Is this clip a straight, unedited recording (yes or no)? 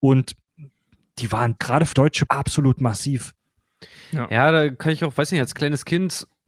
no